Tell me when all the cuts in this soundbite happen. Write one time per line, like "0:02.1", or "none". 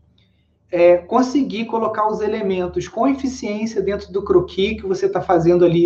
none